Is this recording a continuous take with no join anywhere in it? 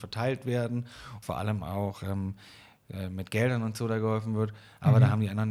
no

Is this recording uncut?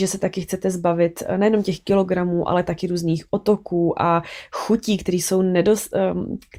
yes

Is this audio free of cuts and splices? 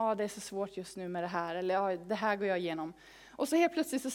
yes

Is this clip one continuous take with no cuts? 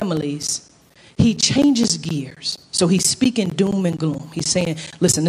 yes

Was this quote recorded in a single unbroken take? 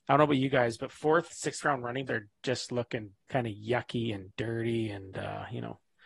no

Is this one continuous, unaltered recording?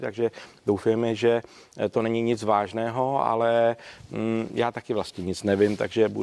yes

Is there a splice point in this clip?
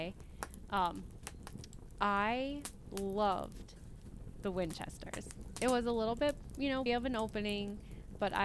yes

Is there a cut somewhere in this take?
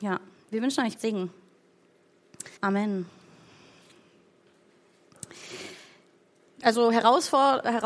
yes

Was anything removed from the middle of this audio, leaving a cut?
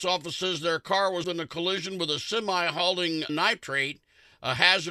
yes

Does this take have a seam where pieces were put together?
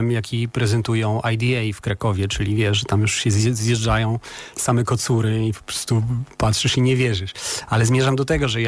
yes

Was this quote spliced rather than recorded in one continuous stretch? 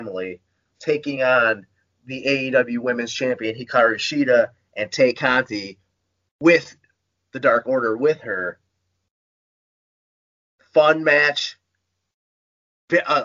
no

